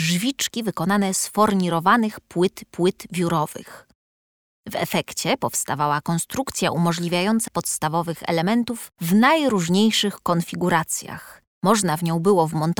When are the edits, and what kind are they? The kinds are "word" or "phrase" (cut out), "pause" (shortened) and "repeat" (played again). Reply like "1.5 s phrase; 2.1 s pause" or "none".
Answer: 2.6 s repeat; 7.5 s word; 8.9 s pause; 11.5 s pause